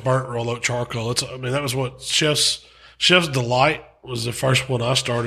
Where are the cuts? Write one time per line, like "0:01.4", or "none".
none